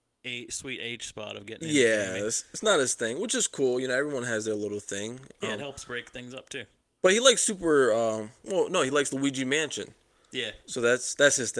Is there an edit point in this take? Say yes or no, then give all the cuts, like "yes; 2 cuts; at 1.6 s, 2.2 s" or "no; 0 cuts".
no; 0 cuts